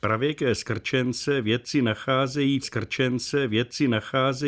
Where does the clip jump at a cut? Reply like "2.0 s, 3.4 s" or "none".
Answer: 2.6 s